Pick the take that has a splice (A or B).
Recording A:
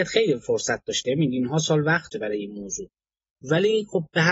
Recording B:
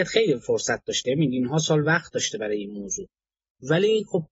A